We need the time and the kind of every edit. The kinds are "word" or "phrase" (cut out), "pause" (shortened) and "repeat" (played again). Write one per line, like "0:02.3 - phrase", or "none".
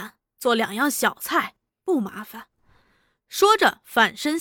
none